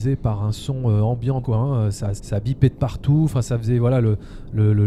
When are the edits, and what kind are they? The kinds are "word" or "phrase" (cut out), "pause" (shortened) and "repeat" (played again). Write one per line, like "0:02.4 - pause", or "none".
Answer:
0:01.4 - word
0:02.2 - word